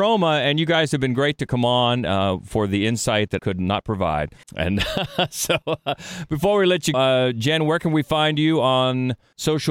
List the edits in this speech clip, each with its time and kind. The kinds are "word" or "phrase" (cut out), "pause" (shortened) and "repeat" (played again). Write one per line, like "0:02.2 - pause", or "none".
0:03.4 - word
0:04.4 - pause
0:06.9 - word